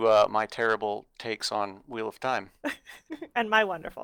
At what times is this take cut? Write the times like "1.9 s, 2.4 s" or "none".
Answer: none